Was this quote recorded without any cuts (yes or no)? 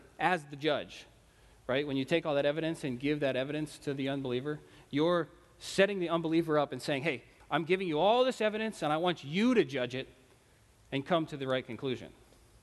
yes